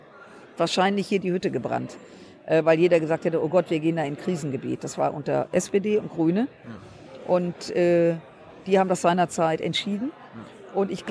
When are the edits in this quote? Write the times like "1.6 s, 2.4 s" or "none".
none